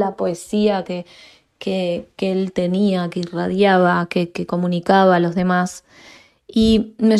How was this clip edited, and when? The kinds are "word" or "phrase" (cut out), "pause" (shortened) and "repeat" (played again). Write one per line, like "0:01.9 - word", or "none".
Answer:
none